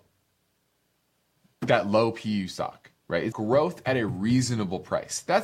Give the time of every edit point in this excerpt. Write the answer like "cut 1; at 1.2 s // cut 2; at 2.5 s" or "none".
cut 1; at 3.3 s